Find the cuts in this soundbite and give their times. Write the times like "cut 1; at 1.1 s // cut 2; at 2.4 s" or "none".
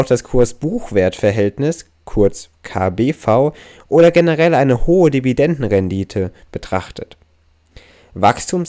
none